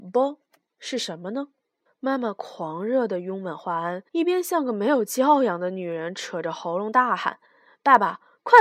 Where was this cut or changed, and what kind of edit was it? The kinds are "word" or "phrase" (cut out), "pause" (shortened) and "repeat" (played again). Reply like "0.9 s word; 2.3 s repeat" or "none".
1.9 s pause; 4.1 s pause; 7.4 s pause